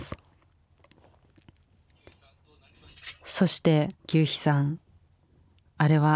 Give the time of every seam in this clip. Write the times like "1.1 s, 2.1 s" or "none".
4.0 s